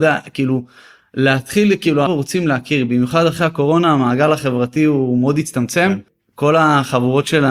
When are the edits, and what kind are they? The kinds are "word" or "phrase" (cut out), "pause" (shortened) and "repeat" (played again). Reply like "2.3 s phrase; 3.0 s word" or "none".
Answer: 2.1 s word